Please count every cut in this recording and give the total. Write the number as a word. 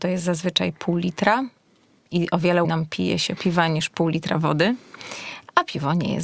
two